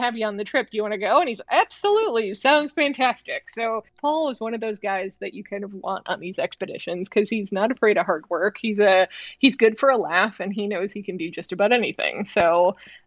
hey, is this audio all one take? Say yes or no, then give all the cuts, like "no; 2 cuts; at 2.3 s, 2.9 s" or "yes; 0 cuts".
no; 1 cut; at 3.9 s